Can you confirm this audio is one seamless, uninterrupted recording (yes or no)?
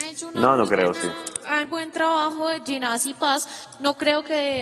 no